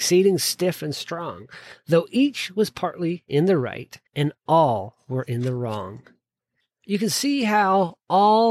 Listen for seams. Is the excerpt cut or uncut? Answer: cut